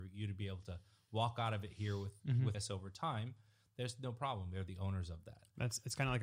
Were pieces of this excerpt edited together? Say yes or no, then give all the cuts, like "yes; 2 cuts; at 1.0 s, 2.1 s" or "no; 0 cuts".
yes; 1 cut; at 2.5 s